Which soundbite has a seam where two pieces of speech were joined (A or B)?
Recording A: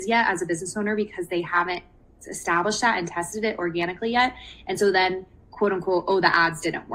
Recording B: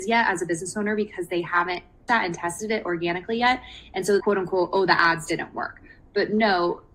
B